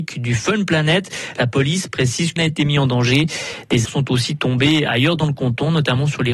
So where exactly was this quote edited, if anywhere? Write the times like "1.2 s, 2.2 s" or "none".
2.4 s, 3.9 s